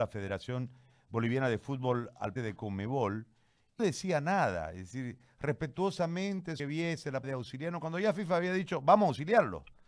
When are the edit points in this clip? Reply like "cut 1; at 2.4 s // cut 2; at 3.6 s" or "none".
cut 1; at 2.4 s // cut 2; at 3.8 s // cut 3; at 6.6 s // cut 4; at 7.2 s

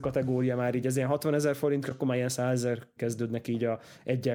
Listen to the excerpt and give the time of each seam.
cut 1; at 1.9 s // cut 2; at 3.0 s

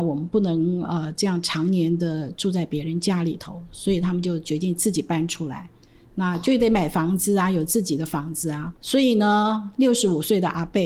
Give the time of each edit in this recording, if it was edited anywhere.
cut 1; at 8.8 s

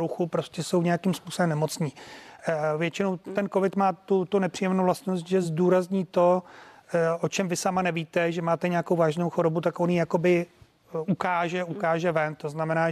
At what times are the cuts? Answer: none

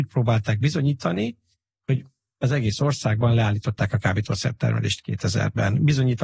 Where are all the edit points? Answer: none

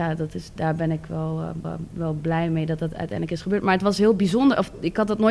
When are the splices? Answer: cut 1; at 1.6 s

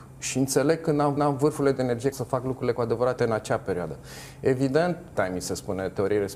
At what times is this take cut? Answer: cut 1; at 1.2 s // cut 2; at 2.1 s // cut 3; at 3.2 s // cut 4; at 5.2 s

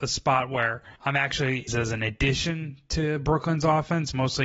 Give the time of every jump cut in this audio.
cut 1; at 1.0 s // cut 2; at 1.7 s

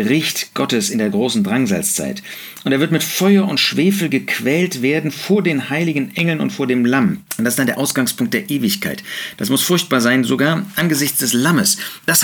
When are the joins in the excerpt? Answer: cut 1; at 7.3 s

